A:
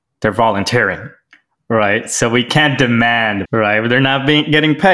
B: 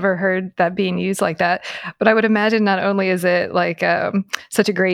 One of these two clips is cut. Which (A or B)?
A